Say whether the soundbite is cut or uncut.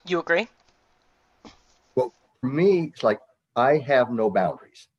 cut